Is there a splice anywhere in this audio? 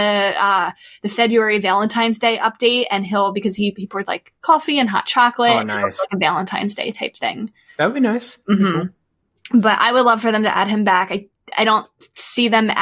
no; 0 cuts

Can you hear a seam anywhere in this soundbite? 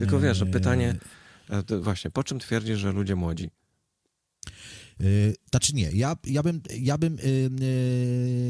no; 0 cuts

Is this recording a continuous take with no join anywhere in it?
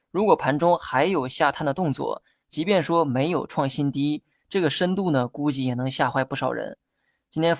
yes; 0 cuts

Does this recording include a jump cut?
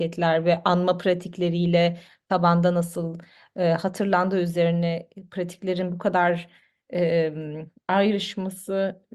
no; 0 cuts

